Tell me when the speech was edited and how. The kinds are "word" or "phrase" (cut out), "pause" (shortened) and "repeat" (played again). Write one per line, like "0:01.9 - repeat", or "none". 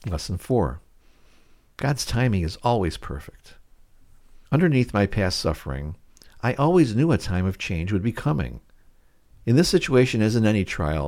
0:04.4 - pause